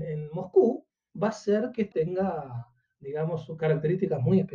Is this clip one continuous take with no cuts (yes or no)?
no